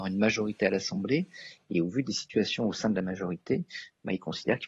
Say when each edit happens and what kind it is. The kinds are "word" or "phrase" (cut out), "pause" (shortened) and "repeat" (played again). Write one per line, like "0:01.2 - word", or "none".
none